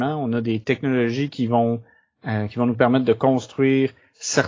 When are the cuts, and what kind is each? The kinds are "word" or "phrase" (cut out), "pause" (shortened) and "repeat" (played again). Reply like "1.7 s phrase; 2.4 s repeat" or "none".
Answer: none